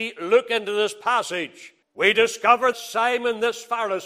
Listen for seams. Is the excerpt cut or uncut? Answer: cut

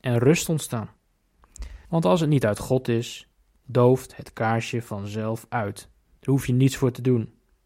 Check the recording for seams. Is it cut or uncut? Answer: cut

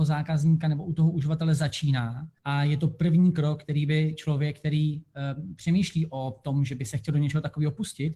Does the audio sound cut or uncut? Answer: cut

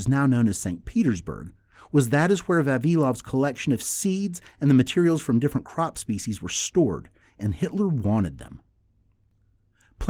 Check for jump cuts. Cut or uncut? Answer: uncut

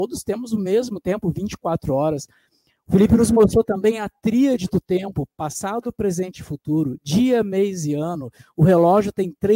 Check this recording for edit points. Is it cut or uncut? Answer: uncut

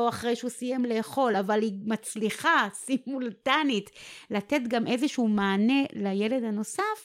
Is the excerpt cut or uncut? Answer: uncut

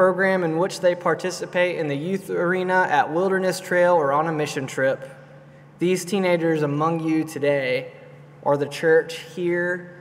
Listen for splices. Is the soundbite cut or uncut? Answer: uncut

